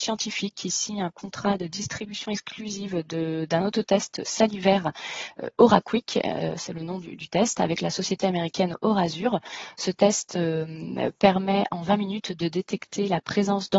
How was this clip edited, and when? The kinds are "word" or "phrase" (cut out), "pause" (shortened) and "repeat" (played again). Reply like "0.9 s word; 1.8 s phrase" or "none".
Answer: none